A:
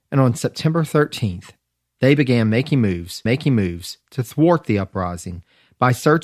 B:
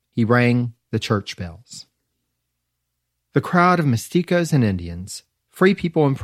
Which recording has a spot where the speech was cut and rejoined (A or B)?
A